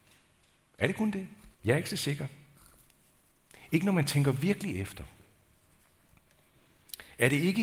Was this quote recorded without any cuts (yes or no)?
no